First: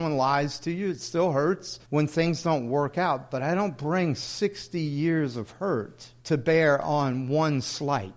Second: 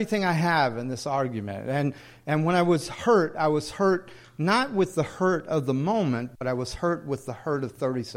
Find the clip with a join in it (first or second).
first